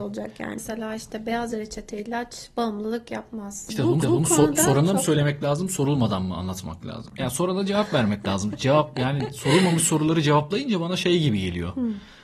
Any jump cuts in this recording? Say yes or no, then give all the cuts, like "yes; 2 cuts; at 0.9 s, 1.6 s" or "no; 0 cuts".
yes; 1 cut; at 4.0 s